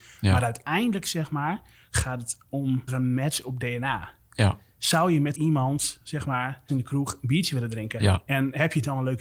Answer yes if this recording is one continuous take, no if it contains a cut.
no